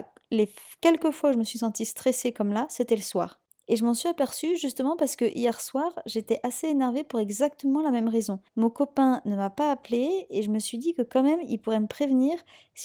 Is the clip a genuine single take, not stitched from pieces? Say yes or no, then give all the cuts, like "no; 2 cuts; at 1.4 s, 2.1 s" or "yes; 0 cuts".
no; 2 cuts; at 3.5 s, 8.5 s